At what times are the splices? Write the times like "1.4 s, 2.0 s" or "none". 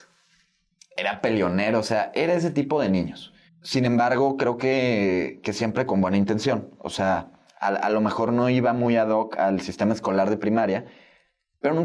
3.5 s